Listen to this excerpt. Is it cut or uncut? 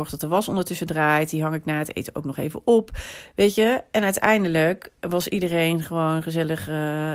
uncut